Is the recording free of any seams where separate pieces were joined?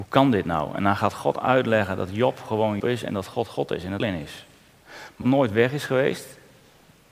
no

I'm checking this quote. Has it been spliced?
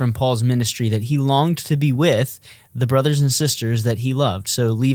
no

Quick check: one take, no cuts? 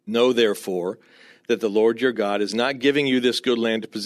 yes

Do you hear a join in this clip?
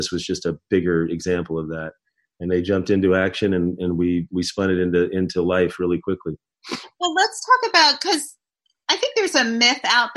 no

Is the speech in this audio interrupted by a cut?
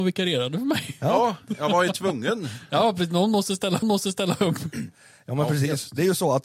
yes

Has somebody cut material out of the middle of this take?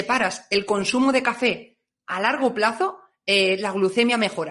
no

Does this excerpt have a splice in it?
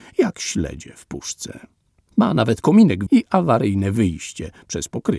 yes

